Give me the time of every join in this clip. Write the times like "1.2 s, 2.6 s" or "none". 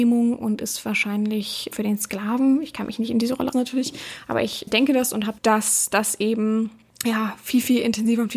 1.7 s, 3.5 s, 4.7 s, 5.4 s, 6.9 s